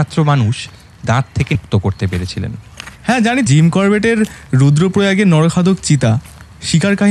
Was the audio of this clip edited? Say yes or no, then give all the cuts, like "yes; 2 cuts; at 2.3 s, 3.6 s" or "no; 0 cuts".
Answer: yes; 4 cuts; at 1.1 s, 1.5 s, 3.0 s, 3.5 s